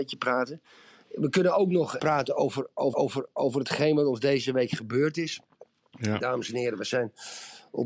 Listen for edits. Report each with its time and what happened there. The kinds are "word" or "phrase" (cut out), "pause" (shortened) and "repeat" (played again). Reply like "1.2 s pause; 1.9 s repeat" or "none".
2.0 s word; 2.9 s repeat